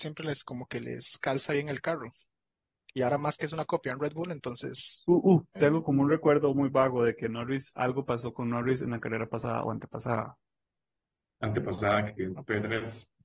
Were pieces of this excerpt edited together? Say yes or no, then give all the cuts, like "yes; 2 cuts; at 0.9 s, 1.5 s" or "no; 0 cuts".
no; 0 cuts